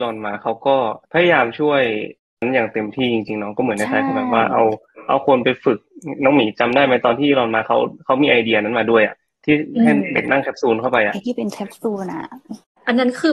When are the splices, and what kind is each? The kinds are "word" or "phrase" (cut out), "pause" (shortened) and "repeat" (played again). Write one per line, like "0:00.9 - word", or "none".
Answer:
0:01.0 - pause

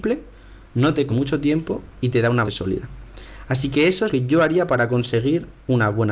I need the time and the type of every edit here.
0:01.1 - word
0:02.4 - word
0:04.1 - word

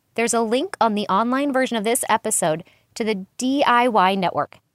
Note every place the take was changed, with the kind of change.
none

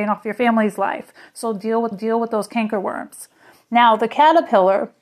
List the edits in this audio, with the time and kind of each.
0:01.9 - repeat

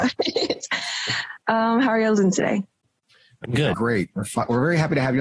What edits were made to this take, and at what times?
0:03.7 - phrase

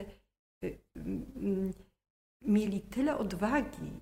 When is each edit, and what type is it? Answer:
none

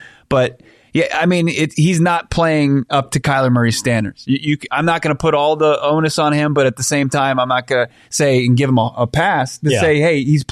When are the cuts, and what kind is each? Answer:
none

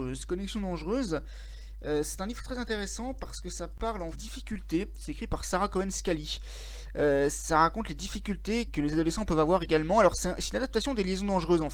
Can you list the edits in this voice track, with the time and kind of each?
0:04.1 - phrase
0:08.7 - phrase

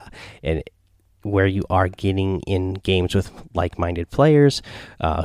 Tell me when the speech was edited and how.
none

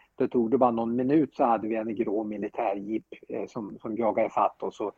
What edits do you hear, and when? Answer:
none

